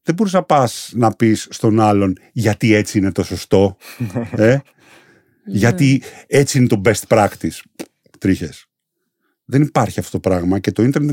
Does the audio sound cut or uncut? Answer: uncut